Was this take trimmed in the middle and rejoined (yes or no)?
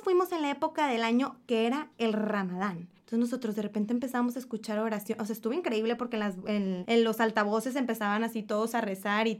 yes